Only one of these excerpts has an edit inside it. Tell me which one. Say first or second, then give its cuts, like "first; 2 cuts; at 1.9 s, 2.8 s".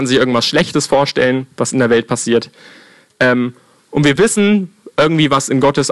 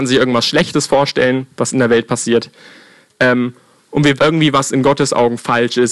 second; 1 cut; at 4.2 s